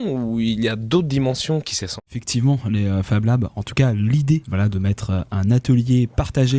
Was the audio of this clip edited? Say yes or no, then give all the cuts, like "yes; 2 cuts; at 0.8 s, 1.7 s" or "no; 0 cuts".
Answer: yes; 1 cut; at 2.0 s